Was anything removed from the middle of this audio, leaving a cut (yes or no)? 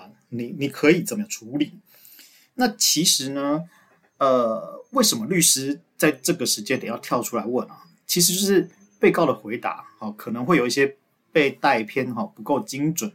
no